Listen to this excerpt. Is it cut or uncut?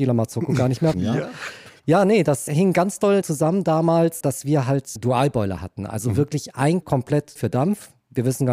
cut